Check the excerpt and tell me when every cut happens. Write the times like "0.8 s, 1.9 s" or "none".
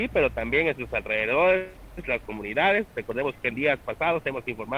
1.8 s